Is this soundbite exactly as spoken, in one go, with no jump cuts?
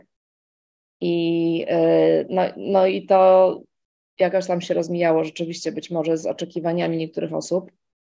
yes; 0 cuts

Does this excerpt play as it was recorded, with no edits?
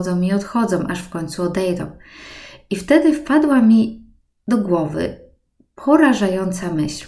yes; 0 cuts

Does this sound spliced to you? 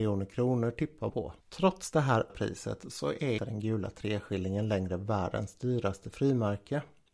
yes; 4 cuts; at 1.1 s, 1.4 s, 2.3 s, 3.4 s

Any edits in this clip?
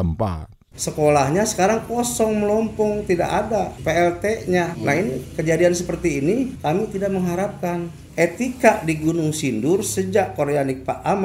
no; 0 cuts

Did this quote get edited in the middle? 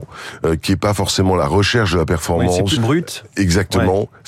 yes; 1 cut; at 2.8 s

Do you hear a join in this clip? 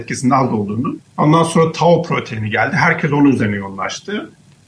yes; 1 cut; at 1.1 s

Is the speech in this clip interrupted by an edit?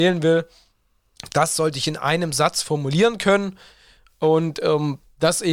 no; 0 cuts

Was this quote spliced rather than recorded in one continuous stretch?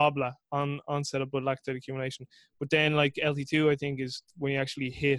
no; 0 cuts

